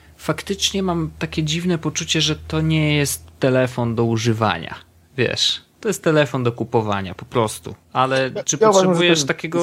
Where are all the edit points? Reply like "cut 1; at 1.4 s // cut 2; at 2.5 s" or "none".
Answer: cut 1; at 5.7 s // cut 2; at 7.8 s